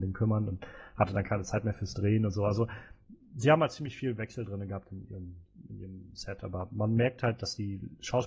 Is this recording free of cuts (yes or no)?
yes